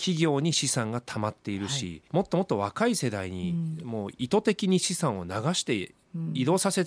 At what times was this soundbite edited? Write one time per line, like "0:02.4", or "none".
0:02.1